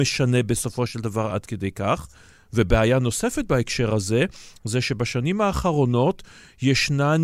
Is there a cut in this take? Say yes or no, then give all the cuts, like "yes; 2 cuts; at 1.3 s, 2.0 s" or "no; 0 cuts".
no; 0 cuts